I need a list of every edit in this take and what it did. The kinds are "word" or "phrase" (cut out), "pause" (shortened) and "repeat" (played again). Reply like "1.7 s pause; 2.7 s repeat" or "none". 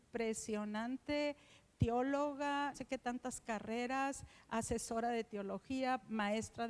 2.7 s word